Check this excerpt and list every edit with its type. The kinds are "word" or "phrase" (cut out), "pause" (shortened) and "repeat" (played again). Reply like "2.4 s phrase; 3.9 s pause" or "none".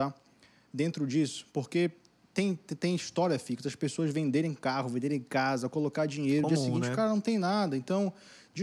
none